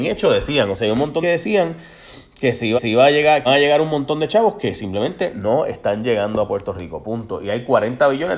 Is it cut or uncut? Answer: cut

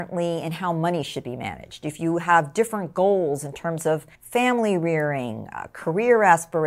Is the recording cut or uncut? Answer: cut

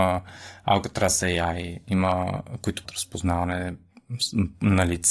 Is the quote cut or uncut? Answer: cut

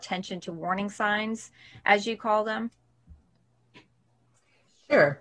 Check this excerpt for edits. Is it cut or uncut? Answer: uncut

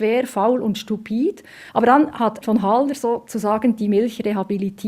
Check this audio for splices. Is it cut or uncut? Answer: cut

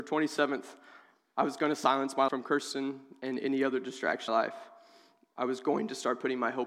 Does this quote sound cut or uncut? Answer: cut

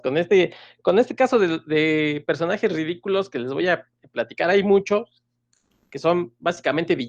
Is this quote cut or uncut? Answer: uncut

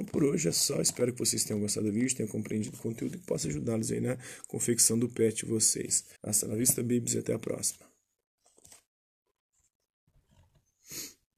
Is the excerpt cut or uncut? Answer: cut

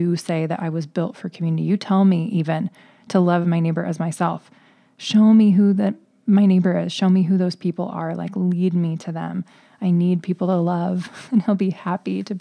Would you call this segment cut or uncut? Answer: uncut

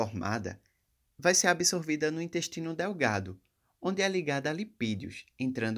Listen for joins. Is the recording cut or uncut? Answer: uncut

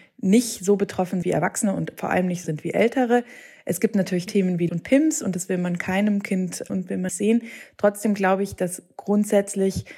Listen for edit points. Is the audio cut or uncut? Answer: cut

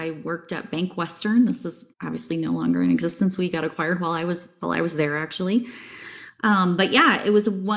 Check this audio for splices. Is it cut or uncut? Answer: cut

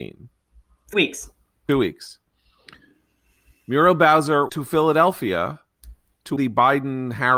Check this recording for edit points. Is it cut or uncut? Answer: cut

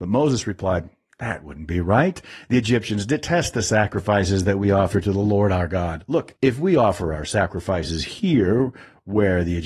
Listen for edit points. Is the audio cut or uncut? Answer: uncut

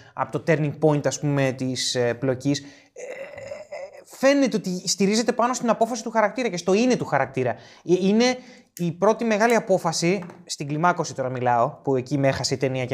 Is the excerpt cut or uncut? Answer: uncut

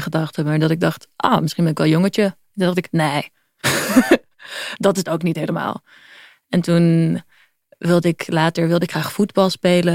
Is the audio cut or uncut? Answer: uncut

